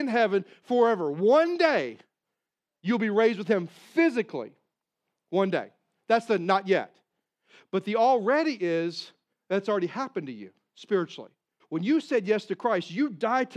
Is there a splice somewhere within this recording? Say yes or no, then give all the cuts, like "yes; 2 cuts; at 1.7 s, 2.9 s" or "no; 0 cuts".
yes; 1 cut; at 11.6 s